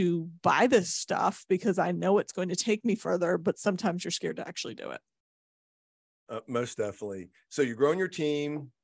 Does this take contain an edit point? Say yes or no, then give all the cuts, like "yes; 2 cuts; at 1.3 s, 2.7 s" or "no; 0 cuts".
no; 0 cuts